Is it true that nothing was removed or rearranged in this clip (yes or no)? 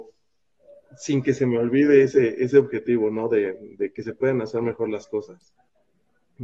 yes